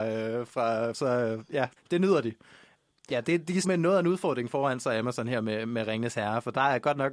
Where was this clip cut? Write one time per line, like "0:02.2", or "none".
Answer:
0:00.9
0:01.8
0:03.6